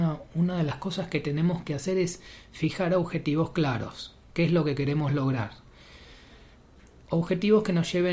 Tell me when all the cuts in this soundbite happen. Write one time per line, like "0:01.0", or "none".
none